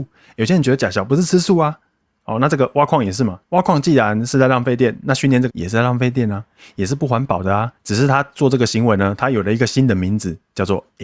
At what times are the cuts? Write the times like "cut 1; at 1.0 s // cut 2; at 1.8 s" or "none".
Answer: cut 1; at 3.4 s // cut 2; at 5.5 s // cut 3; at 7.8 s

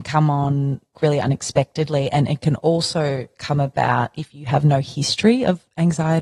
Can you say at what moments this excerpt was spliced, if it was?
cut 1; at 0.9 s

